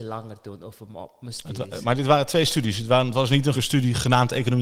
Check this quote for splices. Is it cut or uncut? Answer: cut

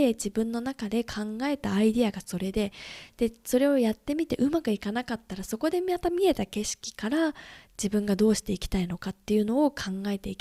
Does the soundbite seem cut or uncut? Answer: uncut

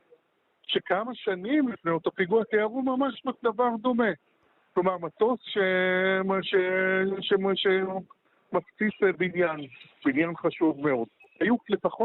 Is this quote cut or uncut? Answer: uncut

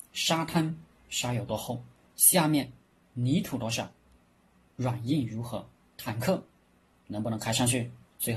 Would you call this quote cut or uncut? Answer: uncut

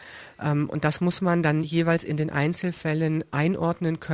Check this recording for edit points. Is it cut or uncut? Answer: uncut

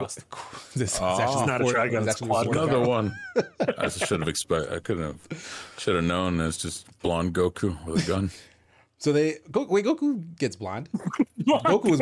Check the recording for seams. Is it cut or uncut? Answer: uncut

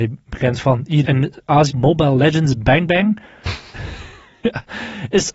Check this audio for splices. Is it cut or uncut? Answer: cut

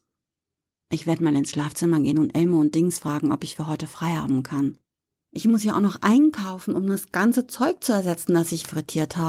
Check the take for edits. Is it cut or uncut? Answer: uncut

